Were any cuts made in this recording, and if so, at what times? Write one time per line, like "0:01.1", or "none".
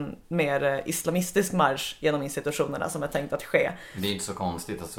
none